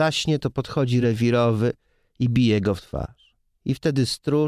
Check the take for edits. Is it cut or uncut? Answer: uncut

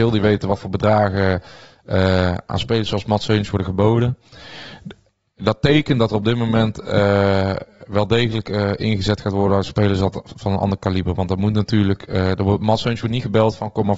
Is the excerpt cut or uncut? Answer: uncut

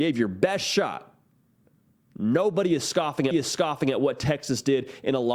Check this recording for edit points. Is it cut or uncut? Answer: cut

